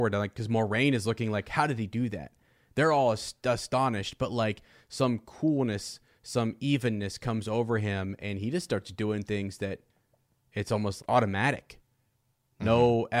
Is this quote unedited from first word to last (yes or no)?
no